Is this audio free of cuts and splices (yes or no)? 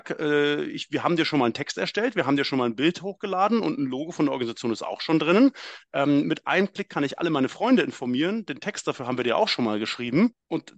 yes